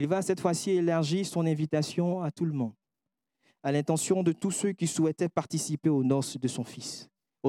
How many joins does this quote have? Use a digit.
0